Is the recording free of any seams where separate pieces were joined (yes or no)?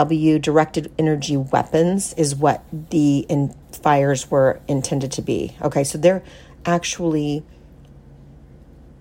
no